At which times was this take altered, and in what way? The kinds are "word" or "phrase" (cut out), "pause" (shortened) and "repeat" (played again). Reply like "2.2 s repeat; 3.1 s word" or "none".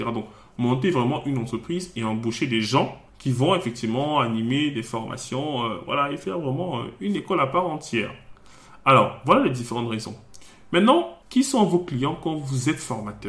3.1 s pause; 11.2 s pause